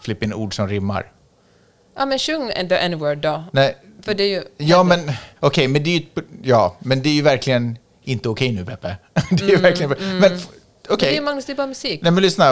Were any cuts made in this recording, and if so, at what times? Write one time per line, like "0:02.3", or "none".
0:05.4